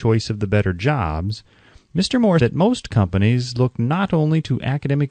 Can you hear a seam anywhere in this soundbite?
yes; 1 cut; at 2.4 s

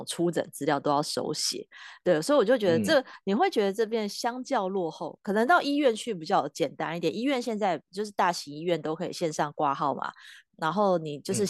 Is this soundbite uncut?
yes; 0 cuts

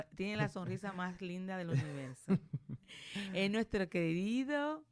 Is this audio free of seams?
yes; 0 cuts

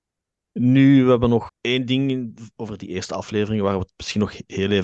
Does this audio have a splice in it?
yes; 1 cut; at 1.5 s

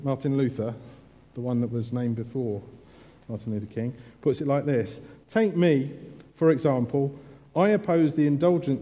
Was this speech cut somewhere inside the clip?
no; 0 cuts

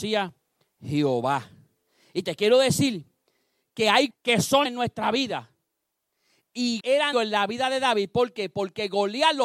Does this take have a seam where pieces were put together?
yes; 4 cuts; at 4.1 s, 4.6 s, 6.8 s, 7.1 s

